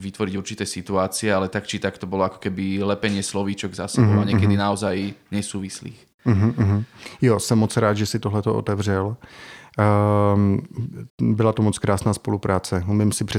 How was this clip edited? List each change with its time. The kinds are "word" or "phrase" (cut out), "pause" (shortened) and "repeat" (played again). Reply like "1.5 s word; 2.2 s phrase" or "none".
11.1 s pause